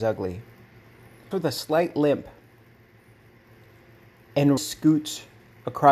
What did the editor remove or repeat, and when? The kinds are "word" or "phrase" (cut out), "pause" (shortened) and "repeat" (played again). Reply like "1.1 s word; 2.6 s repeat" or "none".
1.3 s word; 4.6 s word